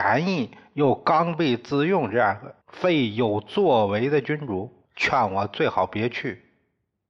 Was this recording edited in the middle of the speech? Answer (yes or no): yes